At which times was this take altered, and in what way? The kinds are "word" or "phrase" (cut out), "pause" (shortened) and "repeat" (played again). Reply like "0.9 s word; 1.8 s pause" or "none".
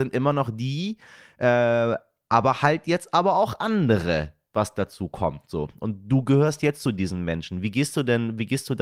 none

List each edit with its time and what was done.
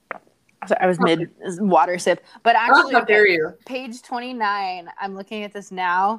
3.6 s pause

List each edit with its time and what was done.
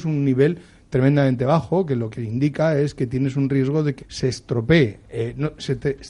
4.0 s word

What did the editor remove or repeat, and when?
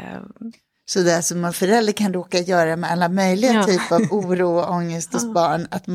1.5 s word

